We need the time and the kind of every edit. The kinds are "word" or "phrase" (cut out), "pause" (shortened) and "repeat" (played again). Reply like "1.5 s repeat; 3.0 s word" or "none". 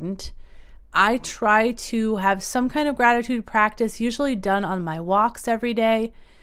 none